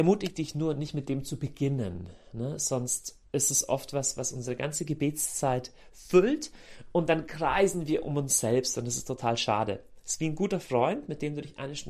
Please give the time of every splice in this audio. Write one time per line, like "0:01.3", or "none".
0:03.3